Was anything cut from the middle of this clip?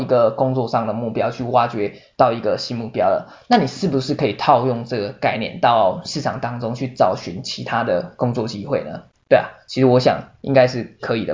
yes; 1 cut; at 9.1 s

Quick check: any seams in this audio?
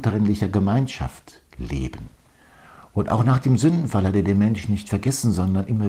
yes; 1 cut; at 1.5 s

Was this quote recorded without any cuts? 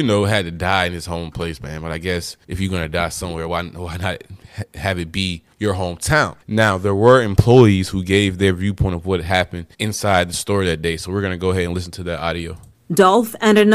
no; 4 cuts; at 2.4 s, 5.5 s, 6.4 s, 9.7 s

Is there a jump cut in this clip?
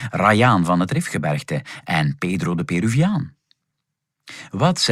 no; 0 cuts

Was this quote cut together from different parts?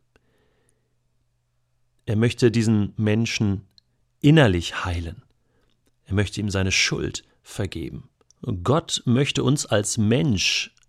no; 0 cuts

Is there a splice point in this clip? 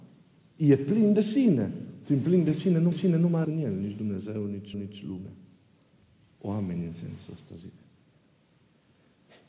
yes; 3 cuts; at 2.9 s, 3.4 s, 4.7 s

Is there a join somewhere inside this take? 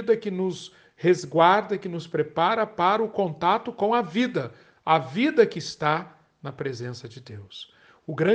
no; 0 cuts

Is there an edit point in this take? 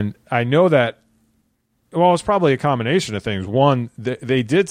no; 0 cuts

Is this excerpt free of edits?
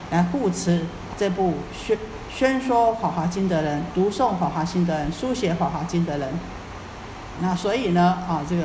no; 3 cuts; at 1.1 s, 3.9 s, 7.4 s

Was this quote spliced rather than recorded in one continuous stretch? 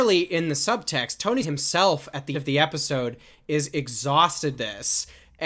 yes; 3 cuts; at 1.4 s, 2.3 s, 4.6 s

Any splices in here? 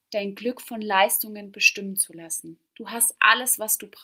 yes; 1 cut; at 2.7 s

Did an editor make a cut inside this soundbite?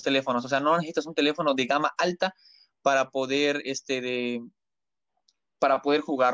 no; 0 cuts

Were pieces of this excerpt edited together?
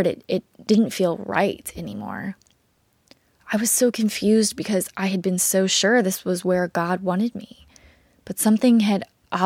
no; 0 cuts

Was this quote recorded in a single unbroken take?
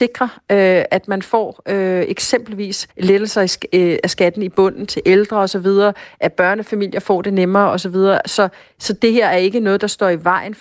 no; 1 cut; at 2.9 s

